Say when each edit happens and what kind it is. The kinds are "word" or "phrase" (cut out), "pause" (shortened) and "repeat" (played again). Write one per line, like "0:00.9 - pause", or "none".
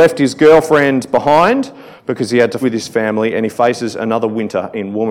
0:02.6 - word